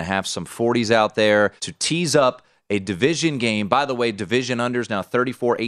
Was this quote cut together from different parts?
yes; 1 cut; at 1.6 s

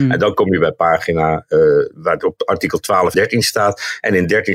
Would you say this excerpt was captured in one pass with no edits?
no; 2 cuts; at 1.9 s, 3.1 s

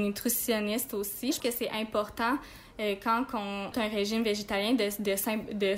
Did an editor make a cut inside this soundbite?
yes; 2 cuts; at 1.4 s, 3.7 s

